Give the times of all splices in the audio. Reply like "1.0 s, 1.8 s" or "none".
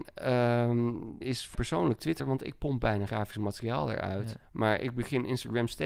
1.2 s, 1.5 s, 2.2 s, 3.1 s, 4.5 s